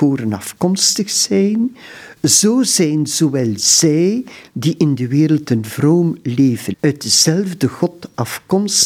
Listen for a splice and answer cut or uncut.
cut